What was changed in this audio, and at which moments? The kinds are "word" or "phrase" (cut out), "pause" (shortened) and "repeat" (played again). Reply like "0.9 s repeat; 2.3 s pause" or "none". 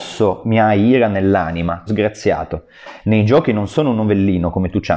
1.9 s word